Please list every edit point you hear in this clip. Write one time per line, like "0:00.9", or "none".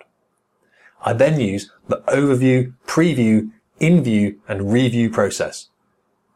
0:02.8

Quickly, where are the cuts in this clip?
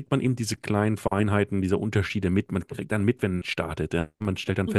0:03.4

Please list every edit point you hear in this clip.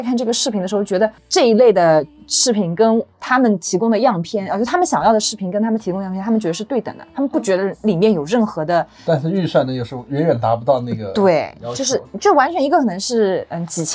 0:03.1

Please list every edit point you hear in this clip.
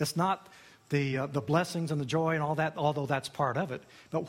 none

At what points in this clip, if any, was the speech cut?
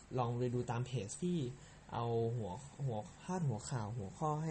0:01.2

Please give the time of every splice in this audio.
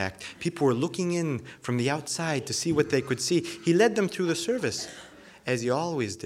none

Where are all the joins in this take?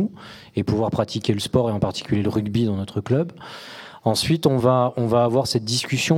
none

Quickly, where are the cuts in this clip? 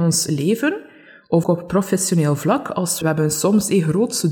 0:01.4
0:03.0

